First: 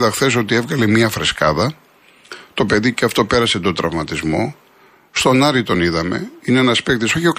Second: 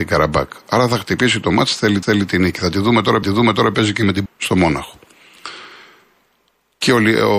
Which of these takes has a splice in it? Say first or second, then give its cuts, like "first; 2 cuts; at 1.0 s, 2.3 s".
second; 3 cuts; at 2.0 s, 3.2 s, 4.3 s